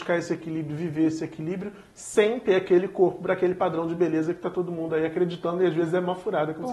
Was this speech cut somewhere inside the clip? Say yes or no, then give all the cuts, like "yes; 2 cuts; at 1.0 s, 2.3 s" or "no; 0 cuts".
no; 0 cuts